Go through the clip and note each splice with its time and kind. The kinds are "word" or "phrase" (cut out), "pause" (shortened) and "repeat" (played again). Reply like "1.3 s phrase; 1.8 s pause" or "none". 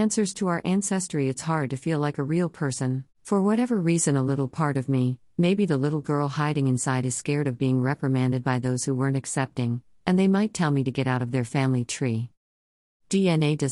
3.1 s pause